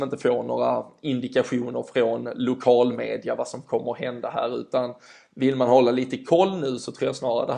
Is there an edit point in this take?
no; 0 cuts

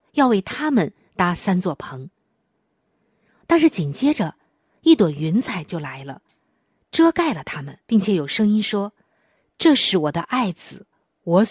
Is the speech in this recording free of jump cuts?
no; 1 cut; at 7.8 s

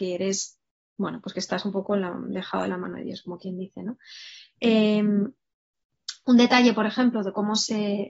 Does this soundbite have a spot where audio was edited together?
no; 0 cuts

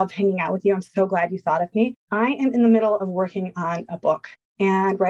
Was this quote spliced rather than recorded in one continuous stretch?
yes; 1 cut; at 2.0 s

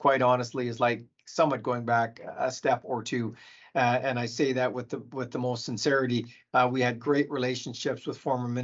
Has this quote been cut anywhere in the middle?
no; 0 cuts

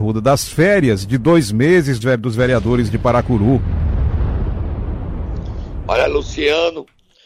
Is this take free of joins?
no; 1 cut; at 2.0 s

